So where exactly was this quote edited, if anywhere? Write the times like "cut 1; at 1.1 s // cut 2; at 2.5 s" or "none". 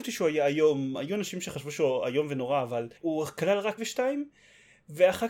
cut 1; at 3.0 s // cut 2; at 3.8 s